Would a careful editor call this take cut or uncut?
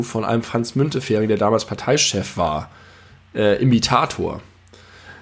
uncut